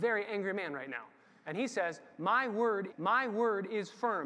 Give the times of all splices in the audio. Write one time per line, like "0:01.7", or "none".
0:02.9